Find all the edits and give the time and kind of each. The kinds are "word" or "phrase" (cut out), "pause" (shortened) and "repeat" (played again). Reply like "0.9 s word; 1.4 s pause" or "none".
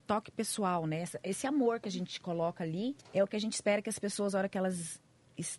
3.0 s pause